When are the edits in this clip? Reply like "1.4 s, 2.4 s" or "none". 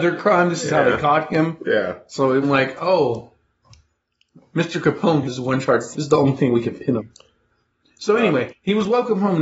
2.4 s, 5.2 s, 5.9 s, 7.0 s, 8.5 s